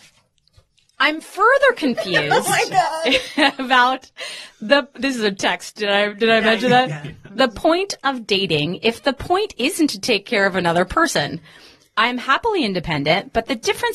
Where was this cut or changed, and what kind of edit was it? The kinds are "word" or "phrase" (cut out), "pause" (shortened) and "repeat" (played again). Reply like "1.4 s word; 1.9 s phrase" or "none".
none